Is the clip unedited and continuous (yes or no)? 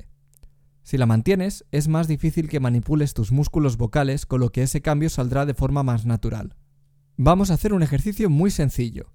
yes